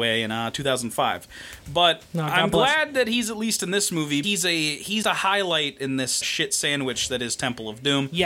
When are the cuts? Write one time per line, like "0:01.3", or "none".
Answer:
0:04.2
0:05.0
0:06.2